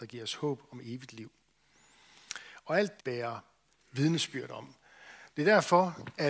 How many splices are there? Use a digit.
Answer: 1